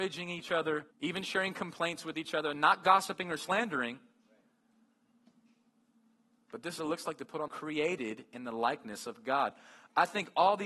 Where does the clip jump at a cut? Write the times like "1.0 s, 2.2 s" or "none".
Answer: 0.9 s, 6.8 s, 7.5 s

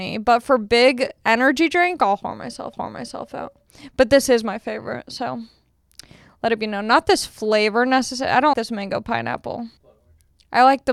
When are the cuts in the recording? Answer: 2.7 s, 8.5 s, 9.8 s

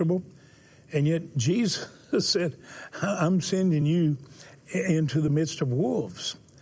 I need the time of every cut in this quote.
none

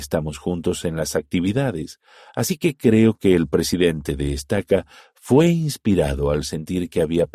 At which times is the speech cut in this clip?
none

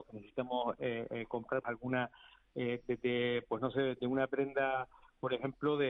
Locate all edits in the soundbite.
1.6 s

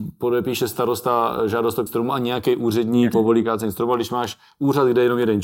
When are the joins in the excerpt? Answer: 1.9 s, 3.1 s

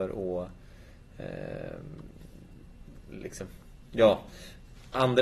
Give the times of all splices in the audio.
none

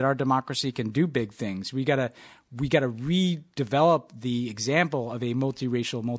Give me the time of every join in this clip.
none

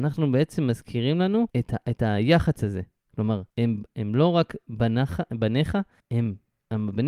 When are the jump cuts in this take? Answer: 1.5 s, 3.5 s, 6.0 s

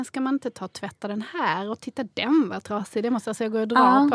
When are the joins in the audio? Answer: none

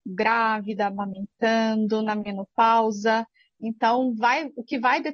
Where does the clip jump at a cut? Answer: none

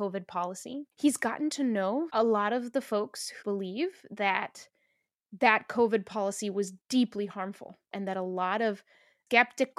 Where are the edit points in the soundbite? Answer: 0.9 s, 2.1 s, 3.4 s, 6.8 s, 7.8 s

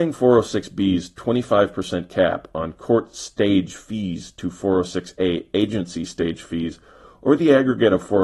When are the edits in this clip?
none

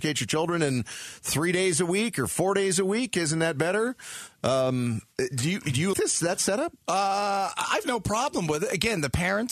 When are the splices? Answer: 5.9 s, 7.8 s

